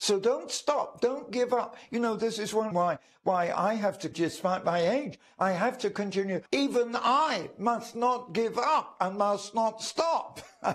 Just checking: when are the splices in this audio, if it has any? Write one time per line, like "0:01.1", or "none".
0:02.7
0:04.1
0:06.5